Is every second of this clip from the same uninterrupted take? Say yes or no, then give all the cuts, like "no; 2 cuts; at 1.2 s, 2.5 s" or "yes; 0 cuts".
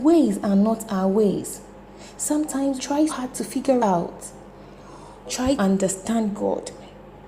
no; 5 cuts; at 2.8 s, 3.1 s, 3.8 s, 5.2 s, 5.6 s